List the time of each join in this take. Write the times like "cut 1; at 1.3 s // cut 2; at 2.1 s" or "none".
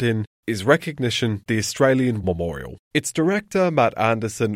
cut 1; at 1.5 s // cut 2; at 2.2 s